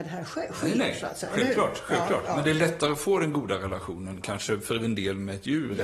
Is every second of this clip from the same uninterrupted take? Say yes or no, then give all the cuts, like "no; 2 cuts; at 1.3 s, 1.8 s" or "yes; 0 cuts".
yes; 0 cuts